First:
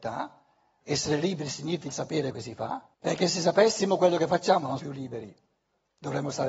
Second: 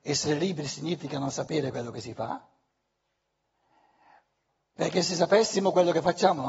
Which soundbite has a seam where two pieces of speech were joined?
first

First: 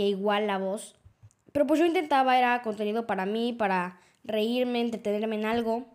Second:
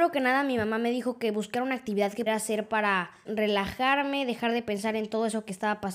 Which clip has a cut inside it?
second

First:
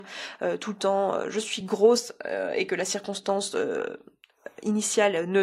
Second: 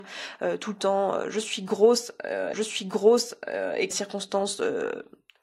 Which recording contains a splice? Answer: second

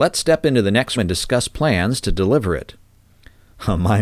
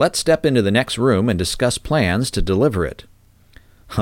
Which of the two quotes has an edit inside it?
first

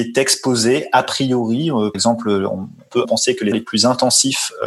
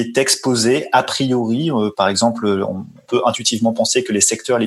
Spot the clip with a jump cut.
first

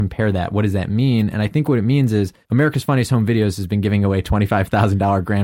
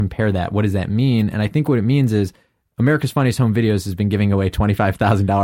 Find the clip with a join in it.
first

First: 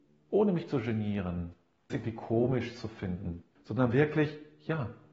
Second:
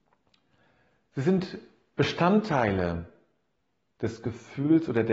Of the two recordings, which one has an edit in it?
first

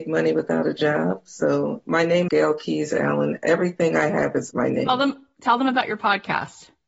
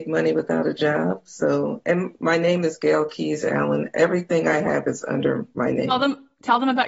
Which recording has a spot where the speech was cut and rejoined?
first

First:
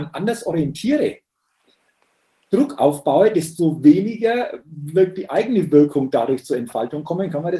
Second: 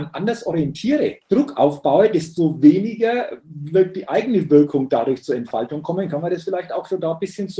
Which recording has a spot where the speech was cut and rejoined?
second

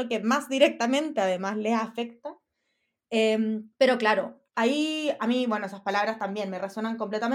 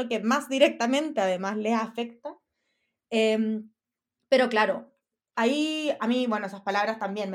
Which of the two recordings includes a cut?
first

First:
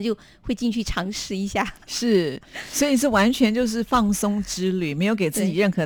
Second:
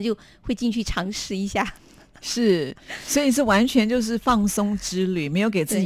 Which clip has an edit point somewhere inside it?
first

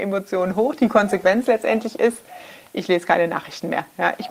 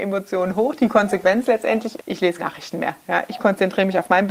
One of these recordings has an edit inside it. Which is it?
second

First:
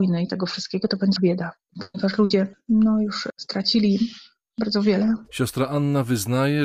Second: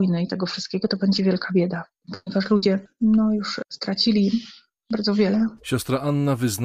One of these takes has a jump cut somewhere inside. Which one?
first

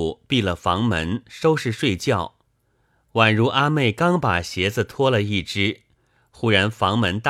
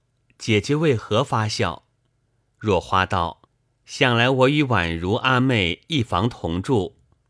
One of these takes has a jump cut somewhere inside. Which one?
second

